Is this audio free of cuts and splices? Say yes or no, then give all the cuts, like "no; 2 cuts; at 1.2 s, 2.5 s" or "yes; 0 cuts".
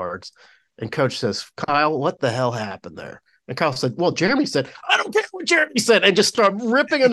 yes; 0 cuts